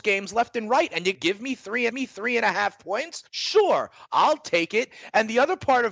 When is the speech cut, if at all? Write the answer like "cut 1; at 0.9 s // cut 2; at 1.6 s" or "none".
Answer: cut 1; at 1.1 s // cut 2; at 1.9 s // cut 3; at 3.3 s